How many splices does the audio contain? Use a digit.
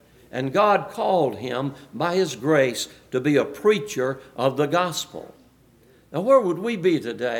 0